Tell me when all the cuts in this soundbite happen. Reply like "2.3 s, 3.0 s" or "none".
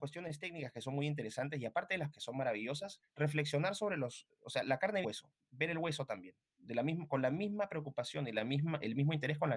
2.1 s, 5.0 s